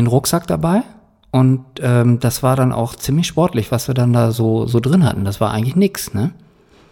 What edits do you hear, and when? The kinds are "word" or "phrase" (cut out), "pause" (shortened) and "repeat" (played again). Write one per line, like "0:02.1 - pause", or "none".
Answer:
none